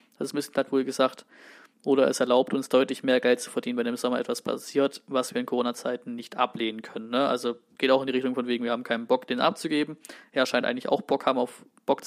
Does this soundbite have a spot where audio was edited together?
no; 0 cuts

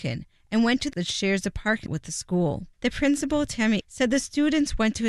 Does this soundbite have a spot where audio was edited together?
yes; 4 cuts; at 0.9 s, 1.9 s, 2.7 s, 3.8 s

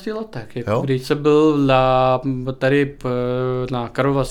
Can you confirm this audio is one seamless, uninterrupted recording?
yes; 0 cuts

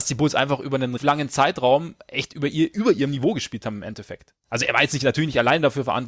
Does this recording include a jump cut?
yes; 1 cut; at 1.0 s

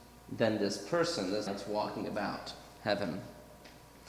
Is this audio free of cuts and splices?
no; 1 cut; at 1.5 s

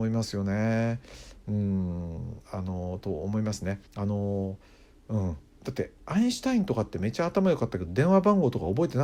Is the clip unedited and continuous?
no; 1 cut; at 3.9 s

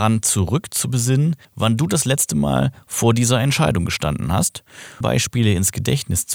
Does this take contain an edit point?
yes; 2 cuts; at 1.4 s, 5.0 s

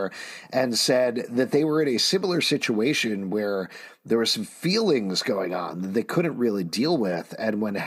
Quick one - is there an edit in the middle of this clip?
no; 0 cuts

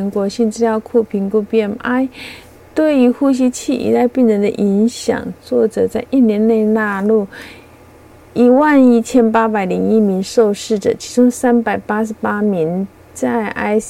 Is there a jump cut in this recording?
no; 0 cuts

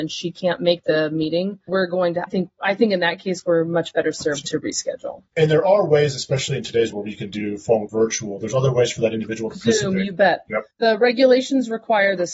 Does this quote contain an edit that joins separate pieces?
yes; 6 cuts; at 1.7 s, 2.3 s, 5.3 s, 6.9 s, 7.9 s, 10.7 s

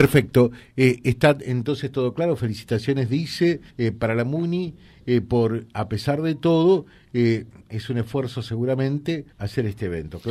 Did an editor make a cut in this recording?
yes; 2 cuts; at 3.7 s, 9.3 s

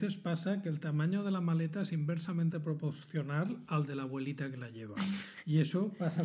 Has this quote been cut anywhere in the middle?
no; 0 cuts

